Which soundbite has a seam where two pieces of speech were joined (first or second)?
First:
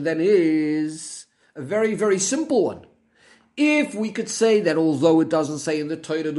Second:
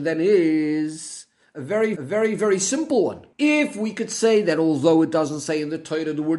second